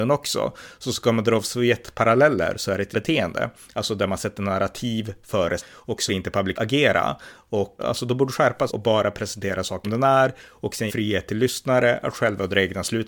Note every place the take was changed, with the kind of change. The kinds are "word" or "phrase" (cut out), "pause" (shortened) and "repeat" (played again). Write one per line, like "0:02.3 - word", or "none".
0:02.9 - word
0:05.6 - word
0:06.1 - word
0:06.5 - word
0:07.8 - word
0:08.7 - word
0:09.8 - word
0:10.9 - word